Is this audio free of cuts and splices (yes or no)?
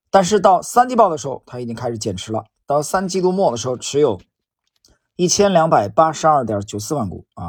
yes